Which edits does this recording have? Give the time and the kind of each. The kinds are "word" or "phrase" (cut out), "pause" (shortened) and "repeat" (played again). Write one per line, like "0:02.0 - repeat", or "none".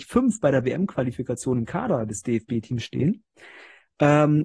none